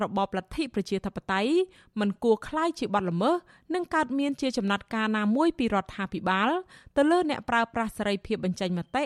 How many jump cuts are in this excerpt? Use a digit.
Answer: 0